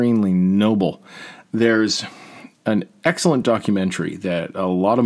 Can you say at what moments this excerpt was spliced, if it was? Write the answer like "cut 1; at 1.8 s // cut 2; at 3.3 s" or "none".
none